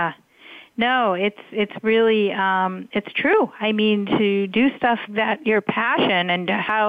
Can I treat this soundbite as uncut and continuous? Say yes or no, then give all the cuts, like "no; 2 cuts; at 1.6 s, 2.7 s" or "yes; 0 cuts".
no; 1 cut; at 5.1 s